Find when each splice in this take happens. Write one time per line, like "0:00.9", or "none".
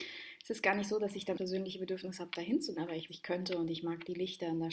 0:01.4
0:02.8
0:03.1